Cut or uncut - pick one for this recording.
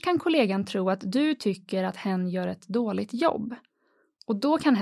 uncut